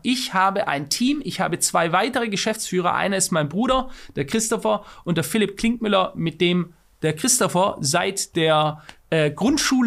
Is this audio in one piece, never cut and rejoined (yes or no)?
yes